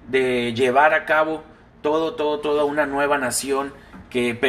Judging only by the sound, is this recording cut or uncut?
uncut